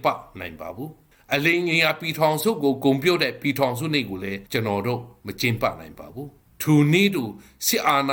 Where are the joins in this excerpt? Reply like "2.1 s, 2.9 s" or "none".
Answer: 1.1 s, 4.5 s, 6.5 s